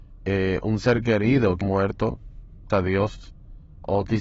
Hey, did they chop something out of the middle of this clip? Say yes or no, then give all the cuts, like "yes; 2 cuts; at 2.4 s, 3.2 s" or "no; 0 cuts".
yes; 2 cuts; at 1.6 s, 2.7 s